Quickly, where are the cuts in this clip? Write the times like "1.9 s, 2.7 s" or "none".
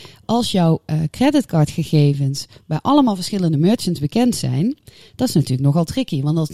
none

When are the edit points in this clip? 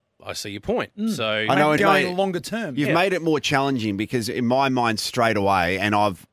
1.8 s

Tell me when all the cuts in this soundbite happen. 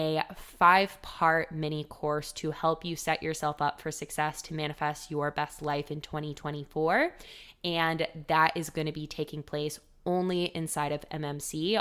none

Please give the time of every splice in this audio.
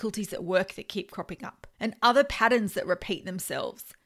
1.7 s

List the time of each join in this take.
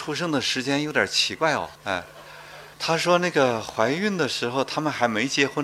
1.8 s, 2.7 s

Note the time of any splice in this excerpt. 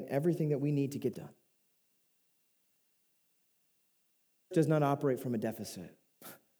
1.1 s, 4.5 s

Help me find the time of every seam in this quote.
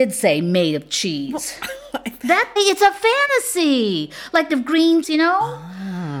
2.6 s, 4.5 s, 5.0 s

